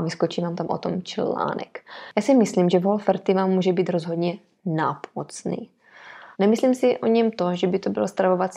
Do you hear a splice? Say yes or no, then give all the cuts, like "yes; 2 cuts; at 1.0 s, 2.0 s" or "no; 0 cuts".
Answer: yes; 1 cut; at 6.3 s